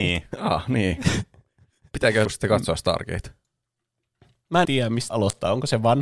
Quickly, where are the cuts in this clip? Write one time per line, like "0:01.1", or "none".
0:02.2
0:04.6
0:05.1